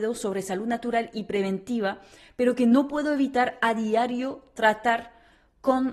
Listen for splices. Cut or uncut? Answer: uncut